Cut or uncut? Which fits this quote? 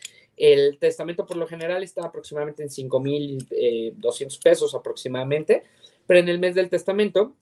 uncut